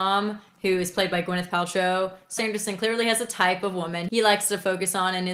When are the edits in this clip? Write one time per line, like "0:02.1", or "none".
0:02.4